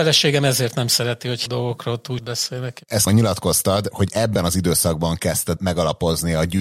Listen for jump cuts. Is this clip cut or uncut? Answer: cut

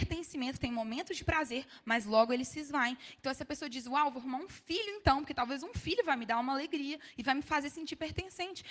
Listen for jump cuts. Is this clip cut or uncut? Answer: uncut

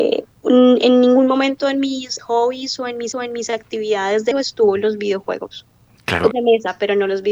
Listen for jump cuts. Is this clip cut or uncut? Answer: cut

